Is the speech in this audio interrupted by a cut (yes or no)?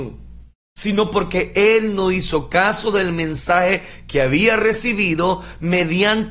no